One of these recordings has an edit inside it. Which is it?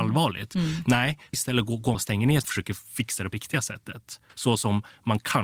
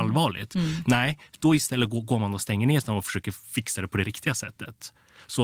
first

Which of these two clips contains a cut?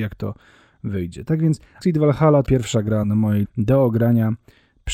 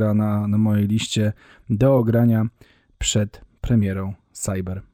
first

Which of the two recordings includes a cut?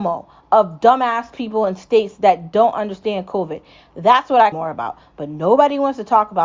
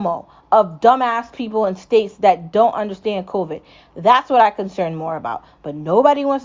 first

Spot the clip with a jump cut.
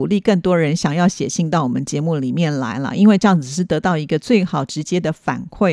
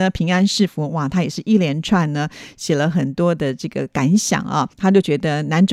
second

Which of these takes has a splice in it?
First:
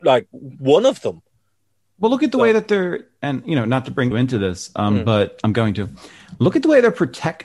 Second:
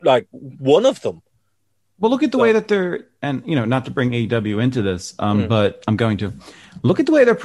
first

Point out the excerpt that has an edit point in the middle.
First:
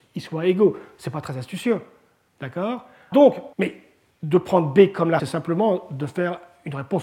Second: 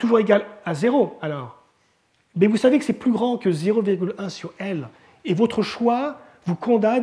first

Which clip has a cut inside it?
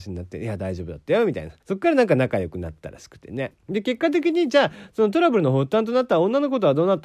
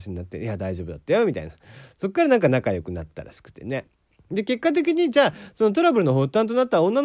first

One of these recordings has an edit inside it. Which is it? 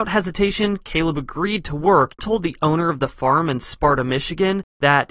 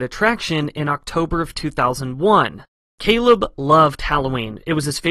first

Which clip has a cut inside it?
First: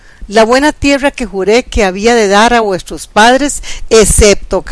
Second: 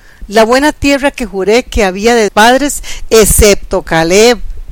second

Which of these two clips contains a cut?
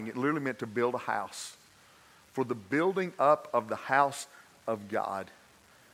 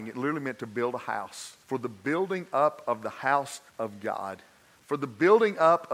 second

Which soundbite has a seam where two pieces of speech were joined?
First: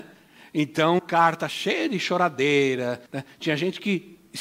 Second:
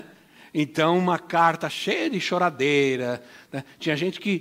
first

